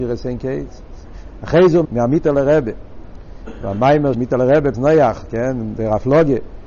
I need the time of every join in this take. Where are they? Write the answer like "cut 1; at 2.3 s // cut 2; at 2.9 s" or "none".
cut 1; at 1.8 s // cut 2; at 4.1 s // cut 3; at 4.7 s